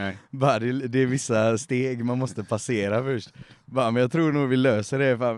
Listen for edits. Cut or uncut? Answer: uncut